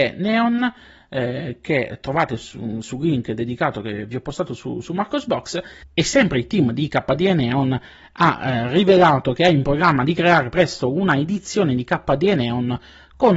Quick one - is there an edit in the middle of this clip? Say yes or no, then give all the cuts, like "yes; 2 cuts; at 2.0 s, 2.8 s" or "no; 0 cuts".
no; 0 cuts